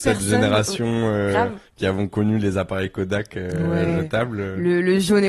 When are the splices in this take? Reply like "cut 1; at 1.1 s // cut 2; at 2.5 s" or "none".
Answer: none